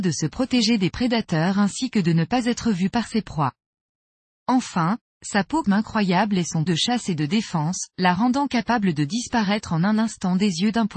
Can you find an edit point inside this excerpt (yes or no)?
yes